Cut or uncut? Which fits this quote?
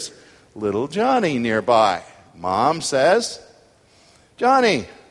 uncut